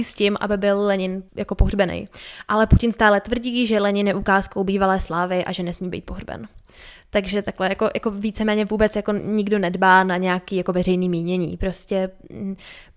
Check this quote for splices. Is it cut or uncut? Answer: cut